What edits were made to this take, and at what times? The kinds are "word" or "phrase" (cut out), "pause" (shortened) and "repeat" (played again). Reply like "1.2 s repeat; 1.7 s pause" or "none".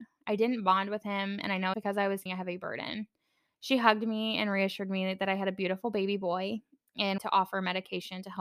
1.7 s word; 2.3 s word; 7.2 s word